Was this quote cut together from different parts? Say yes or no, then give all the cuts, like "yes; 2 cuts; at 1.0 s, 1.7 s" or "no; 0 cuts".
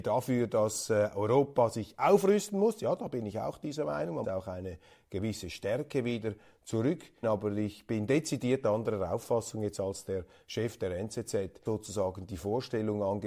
yes; 3 cuts; at 4.2 s, 7.2 s, 11.7 s